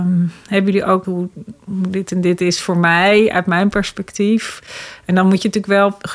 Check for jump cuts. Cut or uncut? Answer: cut